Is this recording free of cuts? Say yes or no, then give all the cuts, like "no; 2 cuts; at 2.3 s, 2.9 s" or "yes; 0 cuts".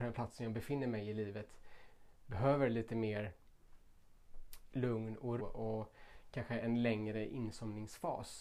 no; 1 cut; at 5.4 s